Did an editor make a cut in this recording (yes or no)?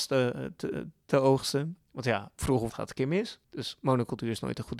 yes